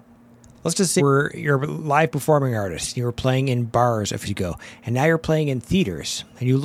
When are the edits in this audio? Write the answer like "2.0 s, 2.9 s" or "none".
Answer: 1.0 s, 4.2 s